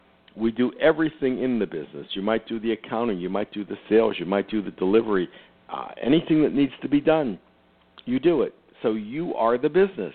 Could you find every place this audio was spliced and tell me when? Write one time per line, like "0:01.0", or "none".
none